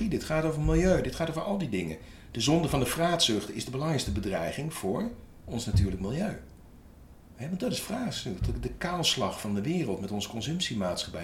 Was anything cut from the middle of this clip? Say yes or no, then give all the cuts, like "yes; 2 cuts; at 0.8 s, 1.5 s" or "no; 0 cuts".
no; 0 cuts